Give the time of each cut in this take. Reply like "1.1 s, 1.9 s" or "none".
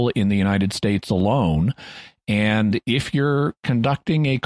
none